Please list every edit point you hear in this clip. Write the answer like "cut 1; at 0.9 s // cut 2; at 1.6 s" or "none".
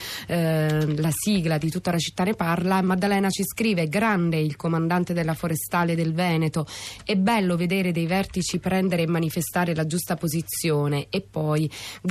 none

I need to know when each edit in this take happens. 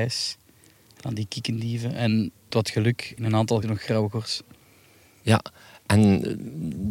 cut 1; at 2.5 s // cut 2; at 3.2 s // cut 3; at 3.6 s

